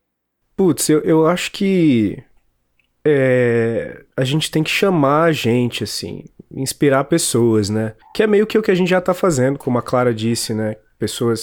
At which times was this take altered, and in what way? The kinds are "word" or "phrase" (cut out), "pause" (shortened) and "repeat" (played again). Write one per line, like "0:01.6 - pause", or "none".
0:04.1 - pause
0:08.0 - pause